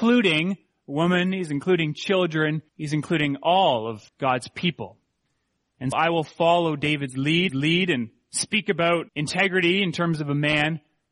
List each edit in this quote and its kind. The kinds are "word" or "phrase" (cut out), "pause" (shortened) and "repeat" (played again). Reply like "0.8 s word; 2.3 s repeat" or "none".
2.7 s pause; 4.1 s pause; 5.9 s word; 7.5 s repeat; 9.1 s pause